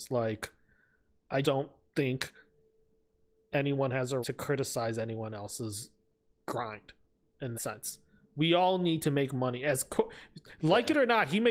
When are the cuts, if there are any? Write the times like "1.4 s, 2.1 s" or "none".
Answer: 1.4 s, 4.2 s, 6.4 s, 7.5 s